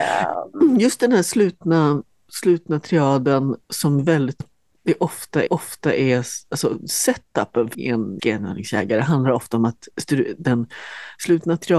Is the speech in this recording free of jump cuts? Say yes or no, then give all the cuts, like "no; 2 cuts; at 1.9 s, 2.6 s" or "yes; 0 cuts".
no; 5 cuts; at 3.6 s, 4.4 s, 5.5 s, 7.7 s, 8.2 s